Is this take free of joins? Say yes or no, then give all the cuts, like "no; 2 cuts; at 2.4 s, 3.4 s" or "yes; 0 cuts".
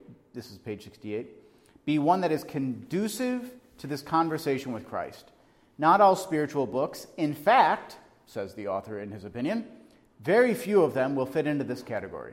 yes; 0 cuts